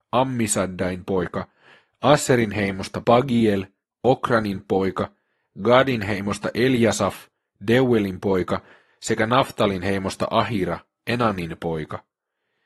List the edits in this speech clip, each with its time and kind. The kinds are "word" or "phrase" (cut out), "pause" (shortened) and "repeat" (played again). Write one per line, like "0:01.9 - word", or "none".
none